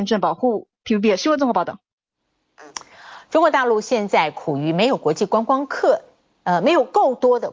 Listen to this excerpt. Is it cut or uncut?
uncut